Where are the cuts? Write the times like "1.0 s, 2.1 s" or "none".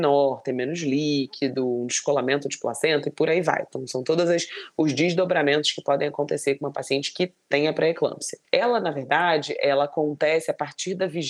none